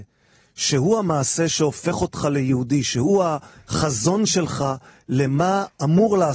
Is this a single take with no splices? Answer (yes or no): yes